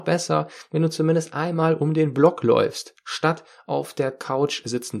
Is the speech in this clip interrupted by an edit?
no; 0 cuts

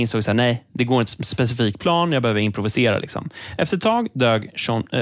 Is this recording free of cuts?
no; 1 cut; at 1.1 s

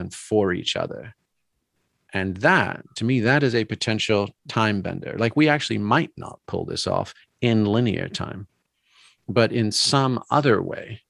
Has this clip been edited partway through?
yes; 1 cut; at 4.4 s

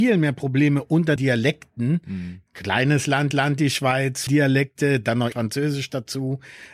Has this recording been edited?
yes; 4 cuts; at 1.2 s, 3.3 s, 4.3 s, 5.3 s

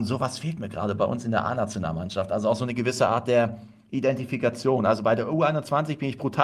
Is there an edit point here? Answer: no; 0 cuts

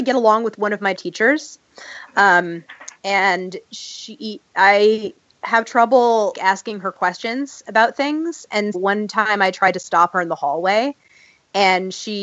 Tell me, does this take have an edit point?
yes; 3 cuts; at 1.0 s, 6.3 s, 8.7 s

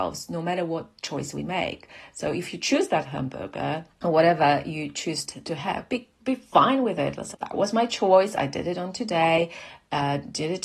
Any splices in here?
yes; 2 cuts; at 5.2 s, 7.3 s

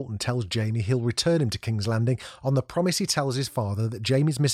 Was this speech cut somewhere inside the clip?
no; 0 cuts

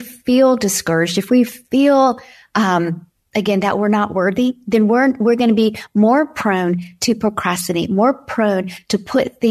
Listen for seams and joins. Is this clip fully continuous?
no; 1 cut; at 3.2 s

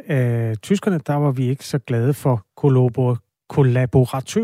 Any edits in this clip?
no; 0 cuts

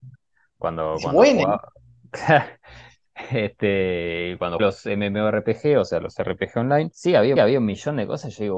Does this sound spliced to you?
yes; 3 cuts; at 4.6 s, 6.9 s, 7.4 s

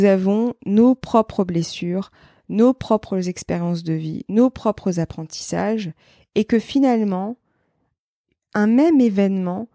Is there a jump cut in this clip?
no; 0 cuts

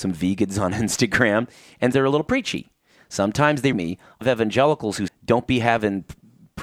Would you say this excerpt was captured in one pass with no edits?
no; 4 cuts; at 1.9 s, 3.7 s, 4.2 s, 5.1 s

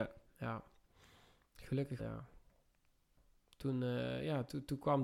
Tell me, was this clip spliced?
yes; 1 cut; at 2.0 s

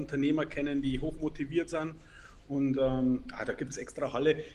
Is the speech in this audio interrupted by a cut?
no; 0 cuts

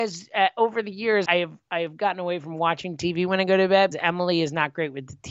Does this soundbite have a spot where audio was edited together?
yes; 2 cuts; at 1.3 s, 3.9 s

